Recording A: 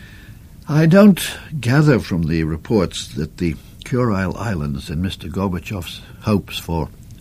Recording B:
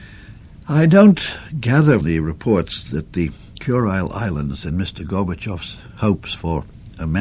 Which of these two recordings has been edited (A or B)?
B